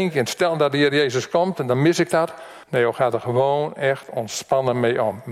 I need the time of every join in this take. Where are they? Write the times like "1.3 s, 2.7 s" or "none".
2.6 s